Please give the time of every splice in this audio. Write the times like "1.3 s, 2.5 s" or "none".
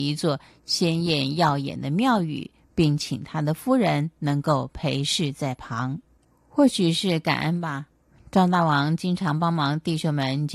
none